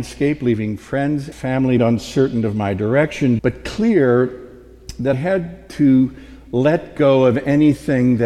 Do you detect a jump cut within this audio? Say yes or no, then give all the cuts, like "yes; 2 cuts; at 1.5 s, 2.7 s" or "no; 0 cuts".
yes; 4 cuts; at 1.3 s, 1.8 s, 3.4 s, 5.1 s